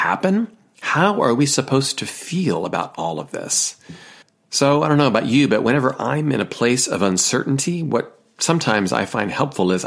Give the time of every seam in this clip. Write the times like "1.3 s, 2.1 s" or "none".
4.2 s